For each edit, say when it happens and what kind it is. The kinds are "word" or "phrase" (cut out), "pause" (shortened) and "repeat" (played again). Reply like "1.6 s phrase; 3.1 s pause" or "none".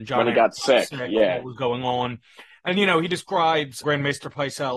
3.8 s word